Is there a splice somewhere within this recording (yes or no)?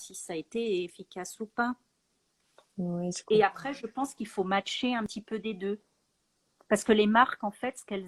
no